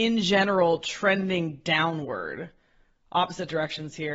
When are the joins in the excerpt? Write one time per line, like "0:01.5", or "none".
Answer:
none

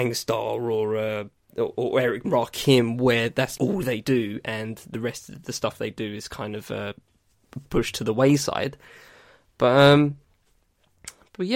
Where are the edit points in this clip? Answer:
0:02.2
0:03.6

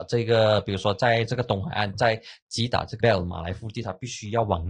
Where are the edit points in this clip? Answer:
0:03.0

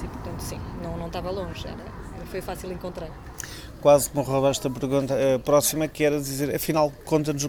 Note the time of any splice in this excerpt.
none

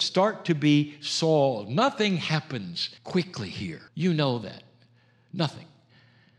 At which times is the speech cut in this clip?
0:03.0
0:03.9

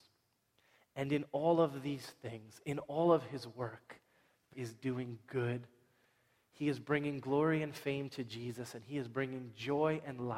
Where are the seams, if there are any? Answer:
0:04.5

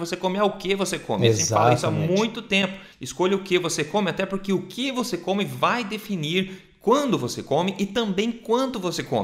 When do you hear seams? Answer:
0:02.9

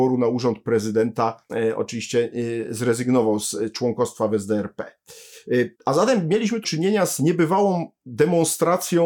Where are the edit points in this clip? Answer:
0:01.5
0:05.7
0:06.6

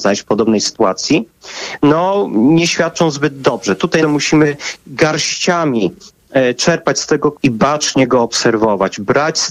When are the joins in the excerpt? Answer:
0:04.0
0:07.3

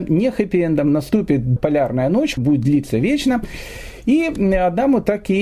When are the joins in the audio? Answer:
0:01.6
0:02.4

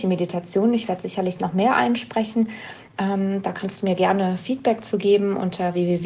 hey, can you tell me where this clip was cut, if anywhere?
none

